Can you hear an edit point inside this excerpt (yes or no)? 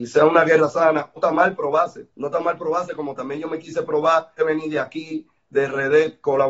yes